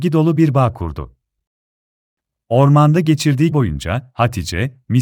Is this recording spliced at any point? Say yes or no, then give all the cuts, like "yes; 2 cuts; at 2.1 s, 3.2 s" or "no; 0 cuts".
yes; 1 cut; at 3.5 s